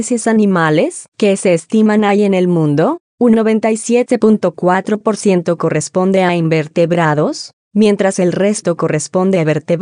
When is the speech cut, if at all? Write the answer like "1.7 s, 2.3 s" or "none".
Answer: none